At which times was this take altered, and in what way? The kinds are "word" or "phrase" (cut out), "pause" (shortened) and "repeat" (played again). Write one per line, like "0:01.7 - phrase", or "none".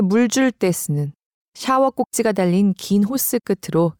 none

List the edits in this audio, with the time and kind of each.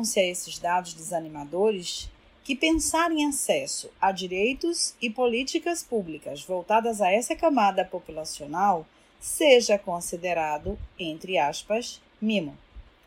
none

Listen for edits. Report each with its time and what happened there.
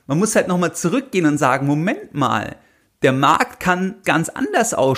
0:04.0 - word

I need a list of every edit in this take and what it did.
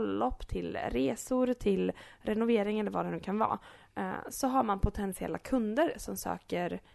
none

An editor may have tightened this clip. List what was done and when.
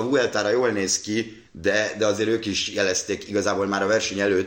0:01.5 - pause

